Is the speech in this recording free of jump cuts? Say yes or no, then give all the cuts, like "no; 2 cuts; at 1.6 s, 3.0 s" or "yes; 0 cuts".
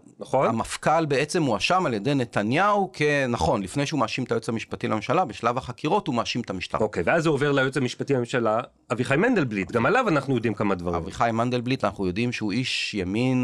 yes; 0 cuts